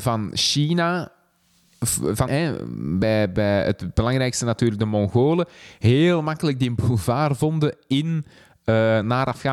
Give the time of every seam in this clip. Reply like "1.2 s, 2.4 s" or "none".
2.3 s